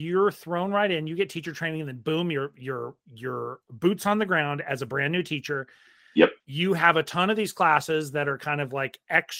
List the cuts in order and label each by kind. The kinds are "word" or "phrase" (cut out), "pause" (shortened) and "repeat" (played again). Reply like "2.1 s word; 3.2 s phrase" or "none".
6.4 s pause